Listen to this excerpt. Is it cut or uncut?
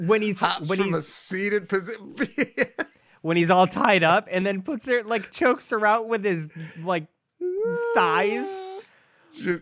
uncut